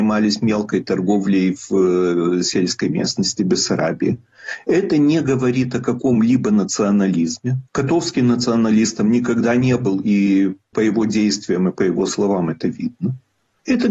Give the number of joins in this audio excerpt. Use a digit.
1